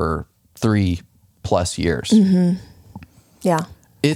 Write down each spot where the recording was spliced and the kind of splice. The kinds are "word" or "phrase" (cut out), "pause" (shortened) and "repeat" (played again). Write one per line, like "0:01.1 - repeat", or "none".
none